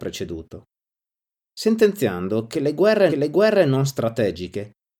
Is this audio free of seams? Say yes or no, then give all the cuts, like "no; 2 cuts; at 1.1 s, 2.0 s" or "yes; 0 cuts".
no; 1 cut; at 3.1 s